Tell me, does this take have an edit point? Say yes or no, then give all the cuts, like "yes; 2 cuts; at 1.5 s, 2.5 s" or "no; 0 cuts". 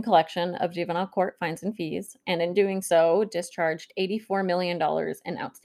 no; 0 cuts